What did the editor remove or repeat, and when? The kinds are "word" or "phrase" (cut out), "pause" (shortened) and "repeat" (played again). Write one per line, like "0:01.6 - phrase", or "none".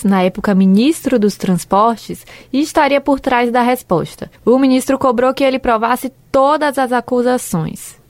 0:04.3 - pause

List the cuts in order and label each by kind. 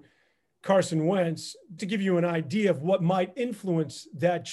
0:01.8 - word

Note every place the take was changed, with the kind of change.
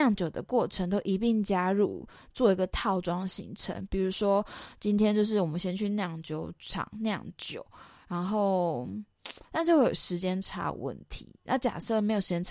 none

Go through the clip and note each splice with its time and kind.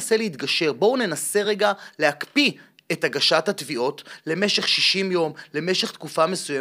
none

